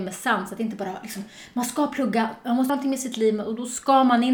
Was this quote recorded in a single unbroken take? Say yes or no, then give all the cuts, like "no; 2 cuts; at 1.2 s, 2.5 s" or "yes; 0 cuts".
no; 1 cut; at 2.7 s